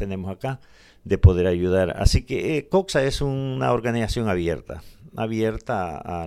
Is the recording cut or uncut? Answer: uncut